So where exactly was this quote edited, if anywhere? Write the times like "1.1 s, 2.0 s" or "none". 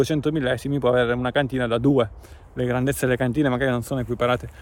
none